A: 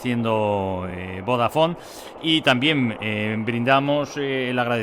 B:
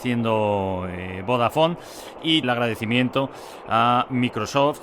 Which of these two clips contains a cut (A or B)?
B